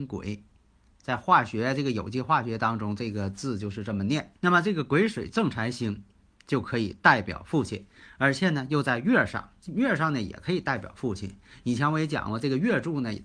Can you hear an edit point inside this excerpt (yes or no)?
yes